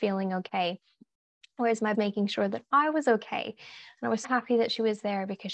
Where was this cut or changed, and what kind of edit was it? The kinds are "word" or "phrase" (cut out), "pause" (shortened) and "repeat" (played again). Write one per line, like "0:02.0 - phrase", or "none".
0:01.9 - phrase
0:04.2 - word